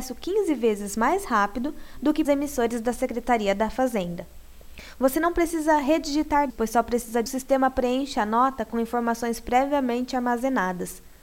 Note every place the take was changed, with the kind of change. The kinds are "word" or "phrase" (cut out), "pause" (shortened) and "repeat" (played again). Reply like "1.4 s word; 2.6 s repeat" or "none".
2.2 s word; 6.5 s word; 7.3 s phrase